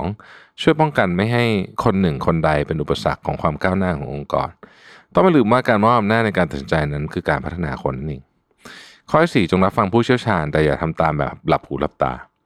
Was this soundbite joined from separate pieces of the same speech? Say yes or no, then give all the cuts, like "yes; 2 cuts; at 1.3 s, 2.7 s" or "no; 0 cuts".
yes; 1 cut; at 1.8 s